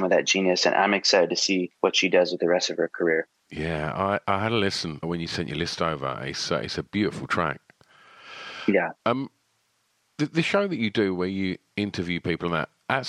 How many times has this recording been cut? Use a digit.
3